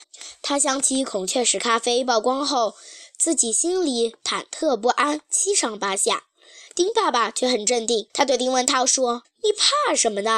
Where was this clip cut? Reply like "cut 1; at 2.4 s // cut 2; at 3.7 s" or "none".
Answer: cut 1; at 8.1 s // cut 2; at 9.2 s